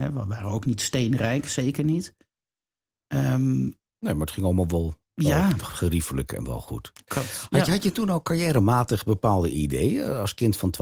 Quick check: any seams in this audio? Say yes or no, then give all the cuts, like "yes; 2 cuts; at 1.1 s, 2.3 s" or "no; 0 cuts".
no; 0 cuts